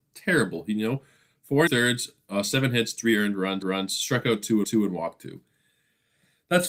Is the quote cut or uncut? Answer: cut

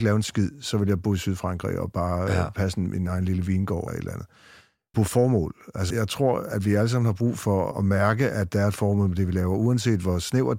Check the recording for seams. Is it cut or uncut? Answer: cut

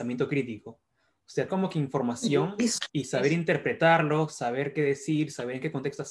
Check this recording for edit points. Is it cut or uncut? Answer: cut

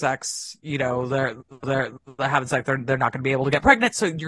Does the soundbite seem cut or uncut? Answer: cut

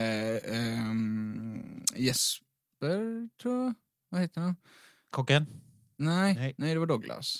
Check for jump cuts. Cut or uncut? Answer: uncut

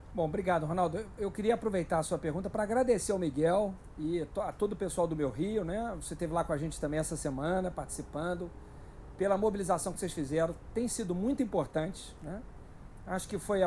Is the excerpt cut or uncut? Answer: uncut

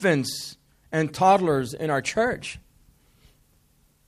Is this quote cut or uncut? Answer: uncut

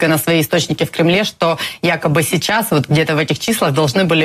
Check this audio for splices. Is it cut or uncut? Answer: uncut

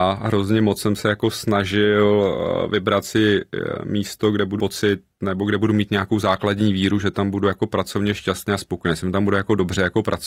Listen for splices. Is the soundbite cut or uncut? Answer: cut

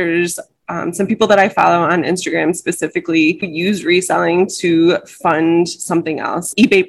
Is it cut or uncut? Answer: cut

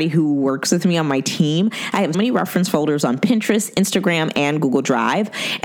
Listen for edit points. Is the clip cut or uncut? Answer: cut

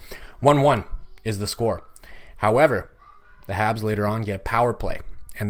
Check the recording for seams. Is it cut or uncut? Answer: uncut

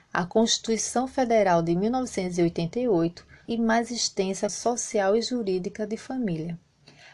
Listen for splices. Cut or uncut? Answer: cut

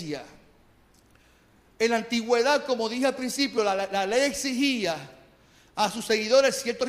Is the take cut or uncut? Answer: uncut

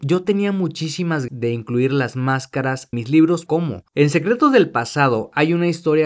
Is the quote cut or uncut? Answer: cut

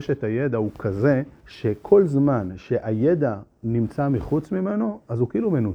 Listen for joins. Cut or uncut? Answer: cut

